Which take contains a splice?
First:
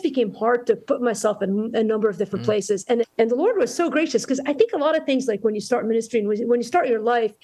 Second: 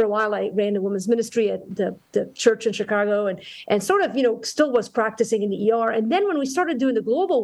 first; 1 cut; at 3.0 s

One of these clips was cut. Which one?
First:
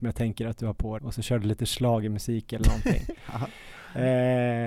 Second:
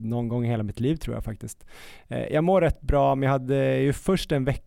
first; 1 cut; at 1.0 s

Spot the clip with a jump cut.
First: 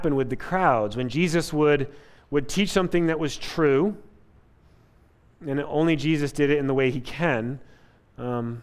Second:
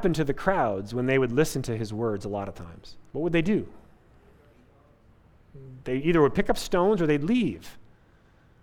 second; 1 cut; at 3.1 s

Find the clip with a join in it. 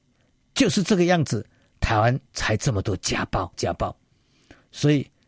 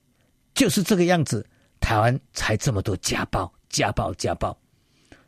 first; 1 cut; at 3.5 s

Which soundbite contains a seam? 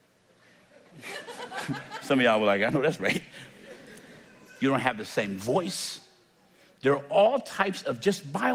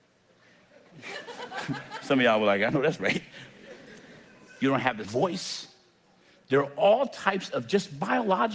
second; 1 cut; at 5.0 s

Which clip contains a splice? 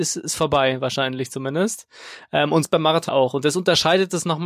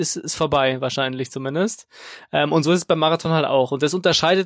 first; 2 cuts; at 2.6 s, 3.1 s

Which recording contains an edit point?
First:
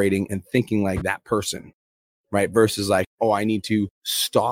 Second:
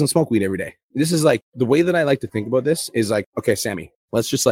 first; 1 cut; at 1.0 s

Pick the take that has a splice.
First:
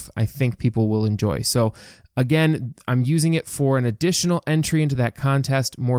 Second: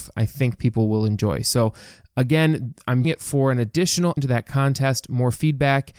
second; 2 cuts; at 3.0 s, 4.2 s

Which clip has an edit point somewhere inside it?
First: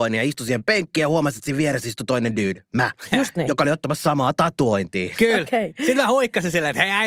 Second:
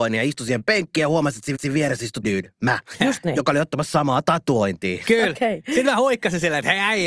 second; 2 cuts; at 1.5 s, 2.2 s

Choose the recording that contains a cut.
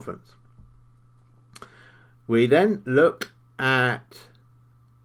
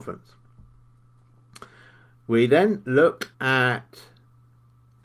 second; 1 cut; at 3.3 s

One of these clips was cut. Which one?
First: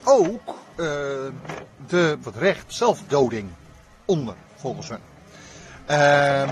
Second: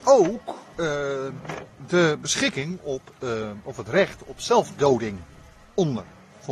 first; 3 cuts; at 2.2 s, 2.7 s, 4.4 s

